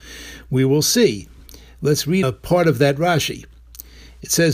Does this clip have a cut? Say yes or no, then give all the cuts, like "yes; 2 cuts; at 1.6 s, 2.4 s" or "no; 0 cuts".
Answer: yes; 1 cut; at 2.2 s